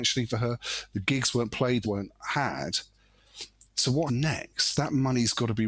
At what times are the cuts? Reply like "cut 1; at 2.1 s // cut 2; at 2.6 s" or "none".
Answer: cut 1; at 1.8 s // cut 2; at 3.7 s // cut 3; at 4.1 s